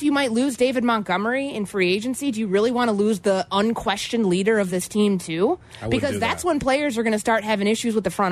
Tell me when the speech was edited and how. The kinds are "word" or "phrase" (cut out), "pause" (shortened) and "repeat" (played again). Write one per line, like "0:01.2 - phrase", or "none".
none